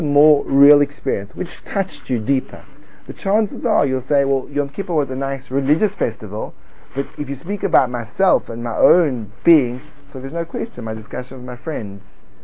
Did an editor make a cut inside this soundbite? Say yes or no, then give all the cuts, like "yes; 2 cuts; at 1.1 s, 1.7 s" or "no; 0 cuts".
no; 0 cuts